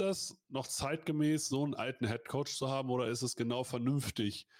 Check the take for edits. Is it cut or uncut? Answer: uncut